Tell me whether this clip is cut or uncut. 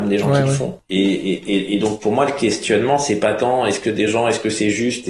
uncut